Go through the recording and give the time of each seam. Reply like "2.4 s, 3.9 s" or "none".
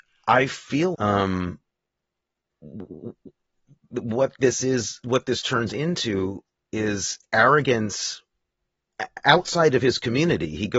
0.9 s

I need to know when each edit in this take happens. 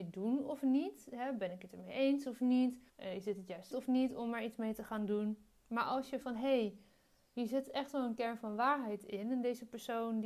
2.9 s, 3.7 s, 6.2 s

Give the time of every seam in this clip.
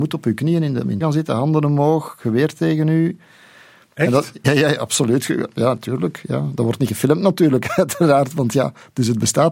1.0 s, 4.4 s

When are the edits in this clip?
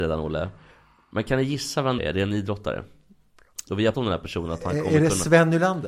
2.0 s, 3.9 s

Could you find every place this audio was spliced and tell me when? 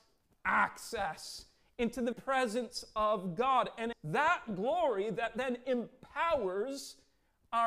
2.1 s, 3.9 s

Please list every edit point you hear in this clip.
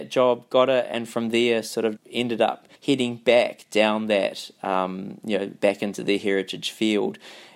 2.0 s, 2.8 s

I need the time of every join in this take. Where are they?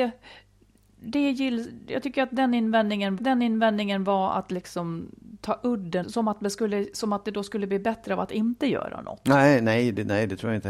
3.2 s, 6.0 s

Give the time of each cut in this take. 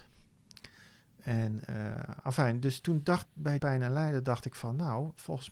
2.8 s, 3.2 s, 3.6 s

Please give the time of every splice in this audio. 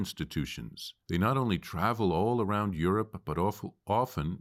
1.0 s

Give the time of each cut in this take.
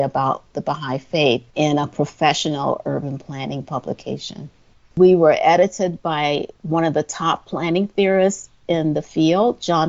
1.5 s, 4.7 s, 6.6 s

